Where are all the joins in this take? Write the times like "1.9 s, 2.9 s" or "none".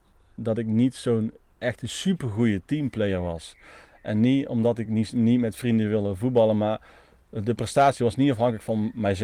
none